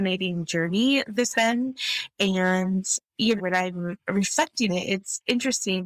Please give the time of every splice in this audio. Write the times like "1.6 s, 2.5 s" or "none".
1.3 s, 3.4 s, 4.7 s